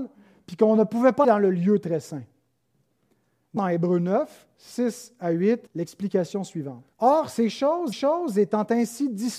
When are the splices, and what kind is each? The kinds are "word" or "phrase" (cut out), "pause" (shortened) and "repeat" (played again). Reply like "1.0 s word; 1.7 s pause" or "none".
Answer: 1.2 s word; 3.6 s word; 5.7 s pause; 6.9 s pause; 7.9 s repeat